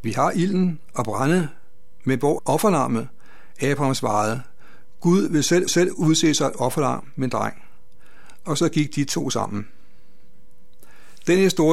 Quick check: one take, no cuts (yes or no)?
no